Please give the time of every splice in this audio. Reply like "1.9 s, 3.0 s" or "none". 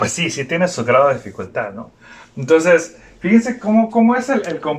none

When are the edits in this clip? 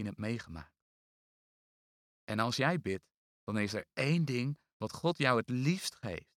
none

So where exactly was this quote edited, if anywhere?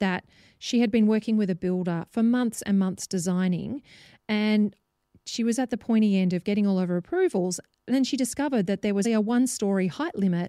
9.0 s

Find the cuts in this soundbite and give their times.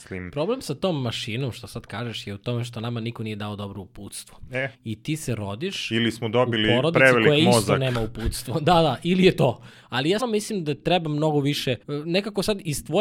4.7 s, 10.2 s, 11.8 s

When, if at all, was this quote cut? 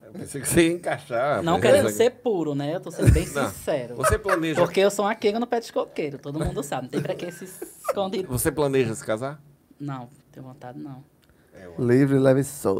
8.2 s, 9.5 s, 10.2 s

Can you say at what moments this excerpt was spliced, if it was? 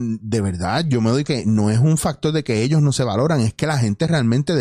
1.2 s

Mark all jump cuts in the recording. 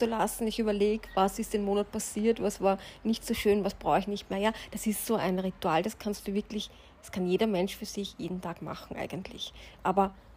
none

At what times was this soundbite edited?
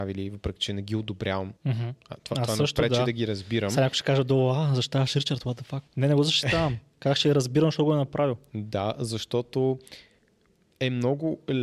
1.6 s, 5.9 s

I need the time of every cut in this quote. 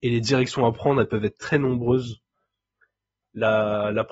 1.4 s

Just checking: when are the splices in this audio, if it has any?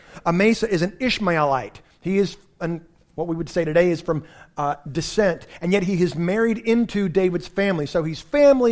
4.8 s

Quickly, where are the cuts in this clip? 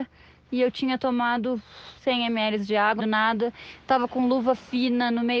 2.0 s, 3.0 s

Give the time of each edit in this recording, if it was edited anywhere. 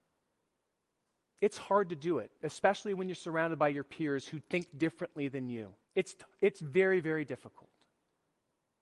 5.8 s

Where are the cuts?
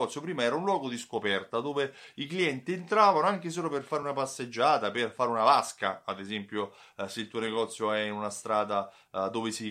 none

